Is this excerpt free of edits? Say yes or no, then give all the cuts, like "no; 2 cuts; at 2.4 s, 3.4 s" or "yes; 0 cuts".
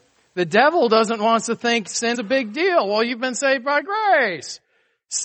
no; 1 cut; at 2.1 s